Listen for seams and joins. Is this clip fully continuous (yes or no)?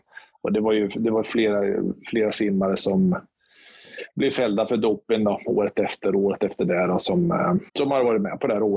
no